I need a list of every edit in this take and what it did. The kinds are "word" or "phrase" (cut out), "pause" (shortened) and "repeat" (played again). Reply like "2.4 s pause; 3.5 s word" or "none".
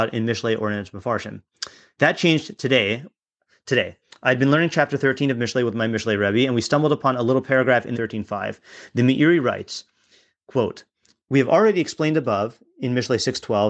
7.9 s phrase